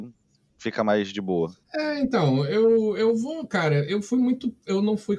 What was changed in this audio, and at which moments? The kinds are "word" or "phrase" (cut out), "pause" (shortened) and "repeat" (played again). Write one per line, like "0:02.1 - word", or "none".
0:01.6 - pause